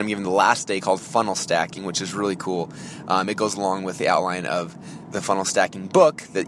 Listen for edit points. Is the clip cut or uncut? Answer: uncut